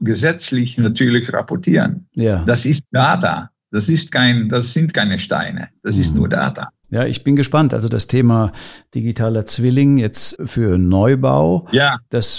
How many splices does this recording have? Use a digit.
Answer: 3